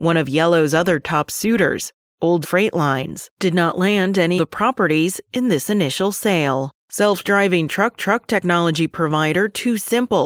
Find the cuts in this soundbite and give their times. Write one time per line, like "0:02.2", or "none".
0:02.4
0:04.4
0:06.8
0:08.0